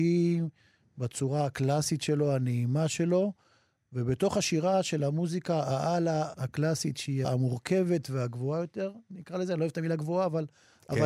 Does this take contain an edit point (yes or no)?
yes